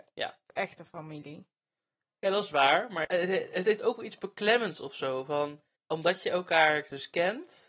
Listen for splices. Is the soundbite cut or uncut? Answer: cut